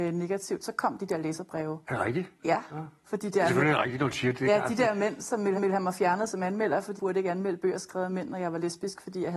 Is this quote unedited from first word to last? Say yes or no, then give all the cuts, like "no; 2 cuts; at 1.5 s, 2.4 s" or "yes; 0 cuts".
no; 4 cuts; at 1.8 s, 2.4 s, 5.5 s, 7.0 s